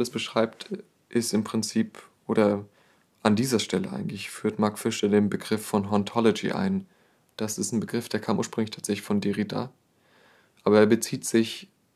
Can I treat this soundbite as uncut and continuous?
yes; 0 cuts

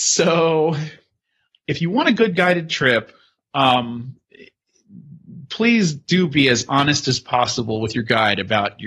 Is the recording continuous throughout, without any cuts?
yes; 0 cuts

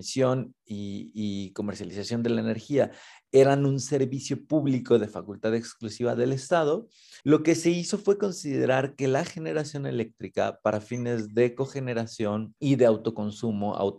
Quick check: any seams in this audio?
yes; 2 cuts; at 7.2 s, 12.6 s

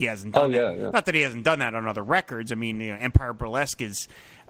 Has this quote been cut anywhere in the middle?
no; 0 cuts

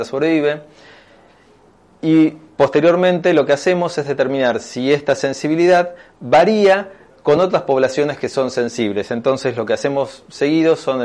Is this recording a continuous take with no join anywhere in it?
yes; 0 cuts

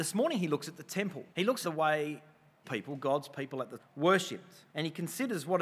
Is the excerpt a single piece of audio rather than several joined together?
no; 5 cuts; at 1.3 s, 1.6 s, 2.6 s, 3.8 s, 4.7 s

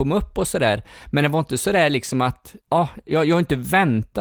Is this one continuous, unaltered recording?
no; 1 cut; at 2.6 s

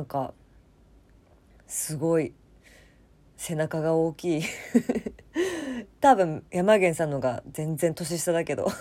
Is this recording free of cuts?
no; 1 cut; at 6.5 s

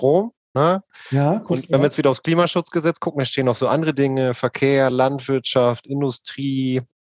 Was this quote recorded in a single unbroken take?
yes; 0 cuts

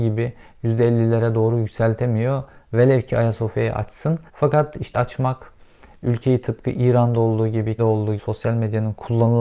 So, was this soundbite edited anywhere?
yes; 4 cuts; at 4.3 s, 4.9 s, 7.8 s, 8.2 s

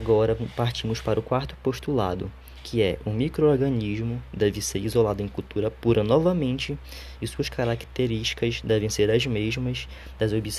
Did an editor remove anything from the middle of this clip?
no; 0 cuts

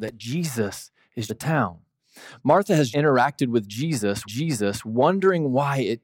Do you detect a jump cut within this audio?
yes; 3 cuts; at 1.3 s, 2.9 s, 4.2 s

